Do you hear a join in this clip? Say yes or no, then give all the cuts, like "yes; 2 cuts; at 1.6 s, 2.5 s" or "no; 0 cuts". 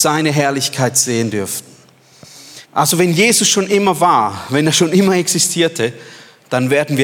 yes; 1 cut; at 2.6 s